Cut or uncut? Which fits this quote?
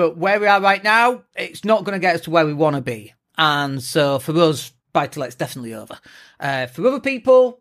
uncut